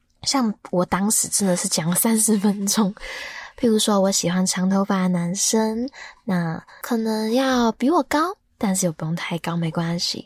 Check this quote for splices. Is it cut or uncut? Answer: uncut